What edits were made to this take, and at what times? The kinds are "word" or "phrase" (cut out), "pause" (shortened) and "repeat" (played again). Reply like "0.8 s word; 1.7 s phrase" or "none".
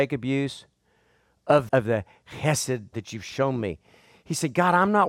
1.7 s word; 2.9 s word